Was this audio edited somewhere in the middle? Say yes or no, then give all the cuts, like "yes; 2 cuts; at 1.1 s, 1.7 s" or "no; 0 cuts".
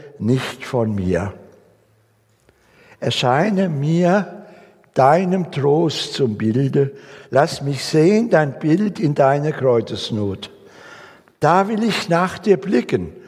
no; 0 cuts